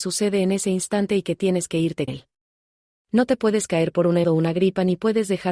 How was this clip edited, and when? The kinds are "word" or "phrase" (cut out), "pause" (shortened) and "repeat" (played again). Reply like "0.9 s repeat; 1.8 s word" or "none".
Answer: 2.1 s word; 4.2 s word